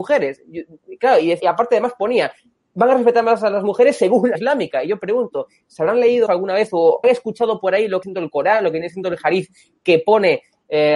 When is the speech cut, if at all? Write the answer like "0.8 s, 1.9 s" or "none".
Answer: 1.4 s, 4.3 s, 6.3 s, 7.0 s, 8.0 s